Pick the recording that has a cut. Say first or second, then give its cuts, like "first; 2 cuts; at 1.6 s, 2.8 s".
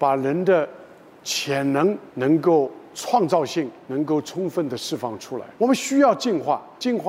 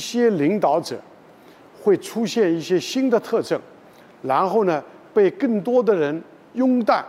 first; 2 cuts; at 2.1 s, 5.6 s